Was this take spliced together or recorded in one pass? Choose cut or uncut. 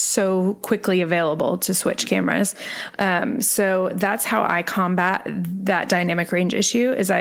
uncut